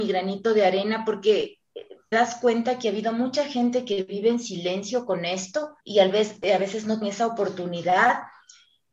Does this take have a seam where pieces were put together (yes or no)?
yes